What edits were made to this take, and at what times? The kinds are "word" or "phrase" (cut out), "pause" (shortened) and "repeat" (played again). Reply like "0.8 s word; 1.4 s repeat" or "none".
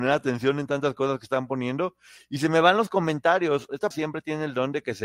3.9 s word